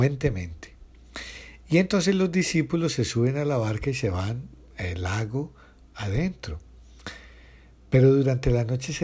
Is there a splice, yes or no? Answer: no